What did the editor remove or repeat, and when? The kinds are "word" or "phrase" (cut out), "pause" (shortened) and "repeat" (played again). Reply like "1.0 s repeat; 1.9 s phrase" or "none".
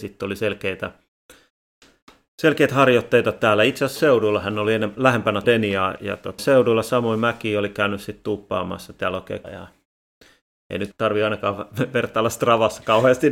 4.0 s word; 5.4 s word; 6.0 s word; 6.4 s word; 9.4 s word; 10.9 s word